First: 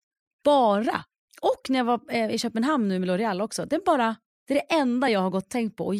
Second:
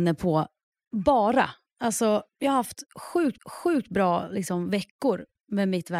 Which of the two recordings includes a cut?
second; 2 cuts; at 2.3 s, 3.4 s

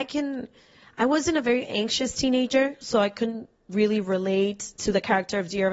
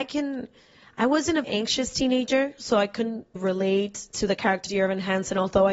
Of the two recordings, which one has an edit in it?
second; 3 cuts; at 1.4 s, 3.4 s, 4.7 s

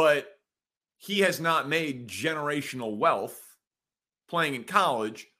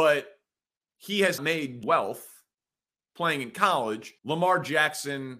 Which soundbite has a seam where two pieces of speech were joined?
second; 3 cuts; at 1.4 s, 1.8 s, 4.2 s

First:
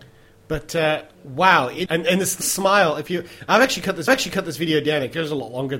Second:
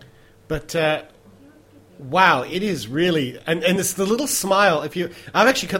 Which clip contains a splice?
first; 4 cuts; at 1.1 s, 1.9 s, 2.4 s, 4.1 s

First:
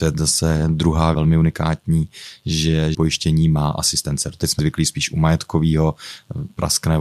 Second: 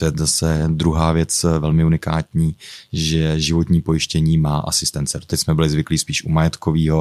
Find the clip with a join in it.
first; 3 cuts; at 1.1 s, 2.9 s, 4.6 s

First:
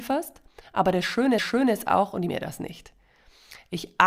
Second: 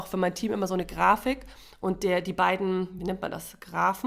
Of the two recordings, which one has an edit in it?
first; 2 cuts; at 1.4 s, 2.3 s

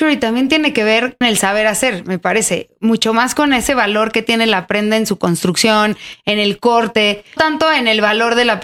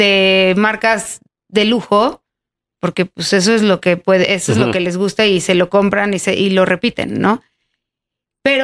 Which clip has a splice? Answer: first; 2 cuts; at 1.2 s, 7.4 s

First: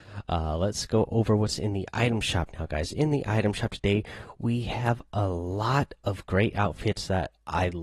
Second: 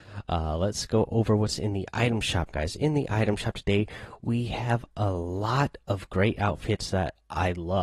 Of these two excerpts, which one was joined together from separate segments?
second; 1 cut; at 2.5 s

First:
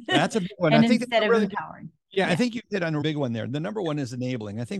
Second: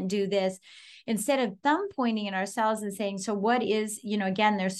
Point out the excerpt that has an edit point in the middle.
first; 1 cut; at 3.0 s

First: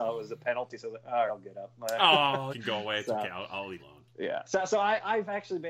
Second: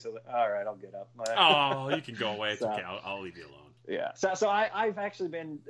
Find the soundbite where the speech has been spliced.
first; 3 cuts; at 1.3 s, 2.5 s, 3.8 s

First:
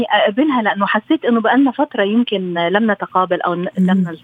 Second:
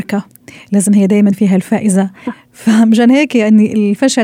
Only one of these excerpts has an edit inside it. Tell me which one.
second; 1 cut; at 1.3 s

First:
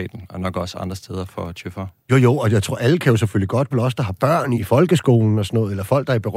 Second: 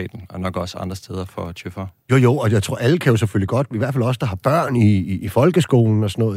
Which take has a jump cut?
first; 2 cuts; at 3.7 s, 4.5 s

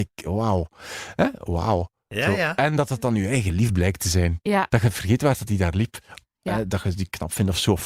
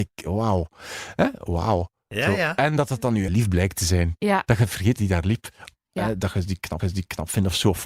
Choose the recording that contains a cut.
second; 3 cuts; at 3.3 s, 5.0 s, 6.8 s

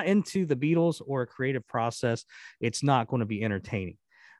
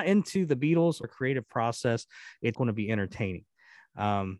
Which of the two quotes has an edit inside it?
second; 2 cuts; at 1.0 s, 2.5 s

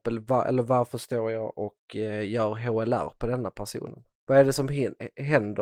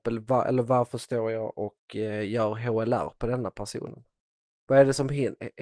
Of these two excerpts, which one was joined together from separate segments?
first; 1 cut; at 4.1 s

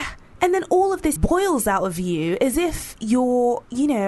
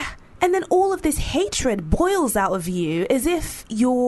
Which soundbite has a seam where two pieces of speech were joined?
first; 1 cut; at 1.2 s

